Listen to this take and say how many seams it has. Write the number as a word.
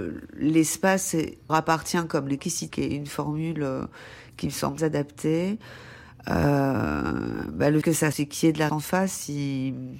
seven